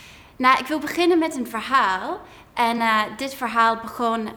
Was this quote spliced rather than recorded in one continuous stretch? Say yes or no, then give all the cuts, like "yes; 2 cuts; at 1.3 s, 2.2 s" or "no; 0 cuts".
no; 0 cuts